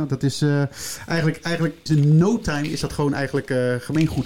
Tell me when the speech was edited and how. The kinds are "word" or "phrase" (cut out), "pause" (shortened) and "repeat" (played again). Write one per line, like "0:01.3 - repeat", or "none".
0:01.9 - phrase